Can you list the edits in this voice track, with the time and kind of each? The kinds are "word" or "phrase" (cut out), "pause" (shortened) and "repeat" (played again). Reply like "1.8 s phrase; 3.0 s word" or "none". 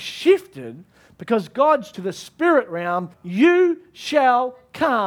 1.9 s phrase; 3.1 s pause